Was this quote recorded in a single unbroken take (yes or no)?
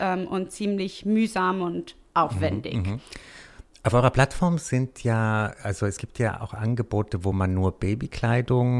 yes